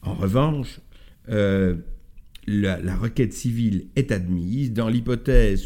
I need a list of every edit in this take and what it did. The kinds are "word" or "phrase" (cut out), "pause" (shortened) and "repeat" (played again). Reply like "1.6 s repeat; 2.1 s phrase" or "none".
none